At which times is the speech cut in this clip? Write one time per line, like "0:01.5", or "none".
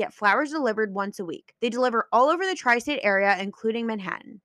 0:01.6